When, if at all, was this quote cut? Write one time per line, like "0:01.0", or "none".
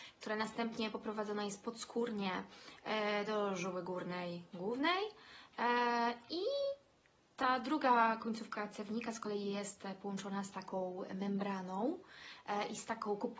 none